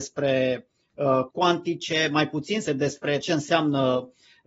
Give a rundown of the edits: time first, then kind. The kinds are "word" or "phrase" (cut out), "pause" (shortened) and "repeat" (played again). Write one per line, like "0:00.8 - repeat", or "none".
0:01.3 - word
0:02.7 - word
0:03.2 - word

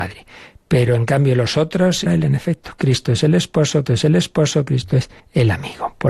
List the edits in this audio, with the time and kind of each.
0:02.1 - phrase
0:03.8 - repeat
0:05.2 - pause

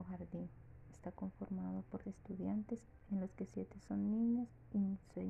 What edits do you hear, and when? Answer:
0:02.0 - word

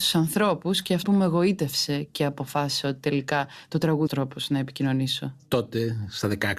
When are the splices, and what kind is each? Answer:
0:01.0 - word
0:04.1 - phrase

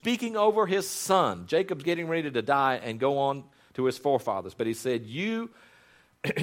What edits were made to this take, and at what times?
none

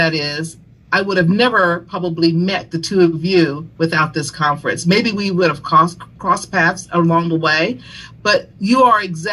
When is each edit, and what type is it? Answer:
none

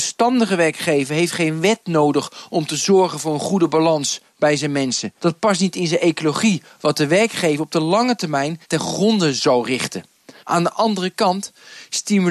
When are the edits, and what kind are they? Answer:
0:05.2 - pause
0:08.6 - pause
0:10.4 - pause

